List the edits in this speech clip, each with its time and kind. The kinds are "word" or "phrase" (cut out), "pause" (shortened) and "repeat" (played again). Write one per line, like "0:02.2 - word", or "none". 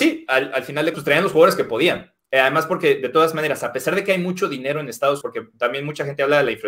0:00.9 - word
0:05.2 - word